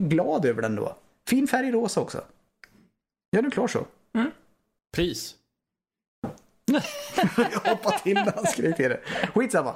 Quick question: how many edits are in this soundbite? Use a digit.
0